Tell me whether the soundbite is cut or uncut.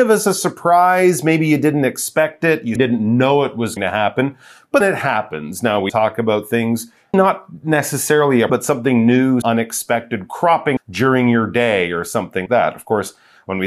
cut